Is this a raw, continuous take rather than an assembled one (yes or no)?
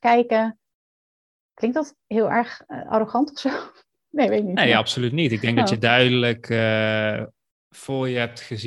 yes